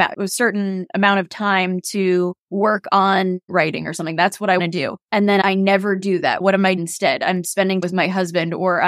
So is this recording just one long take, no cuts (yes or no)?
no